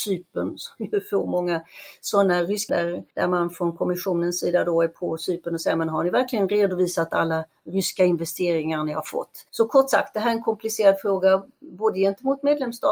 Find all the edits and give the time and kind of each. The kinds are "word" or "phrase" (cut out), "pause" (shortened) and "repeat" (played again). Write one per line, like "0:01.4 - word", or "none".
0:02.7 - word
0:03.1 - pause
0:09.5 - pause